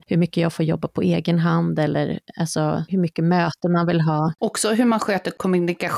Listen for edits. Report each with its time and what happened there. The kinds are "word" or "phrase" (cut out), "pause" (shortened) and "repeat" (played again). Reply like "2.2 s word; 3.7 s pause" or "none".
none